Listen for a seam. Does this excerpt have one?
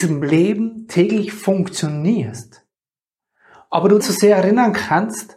yes; 1 cut; at 4.0 s

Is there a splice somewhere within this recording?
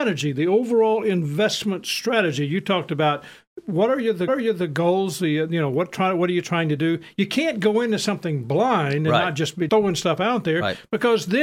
yes; 2 cuts; at 4.3 s, 9.7 s

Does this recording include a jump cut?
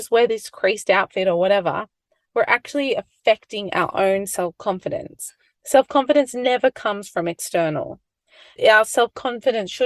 no; 0 cuts

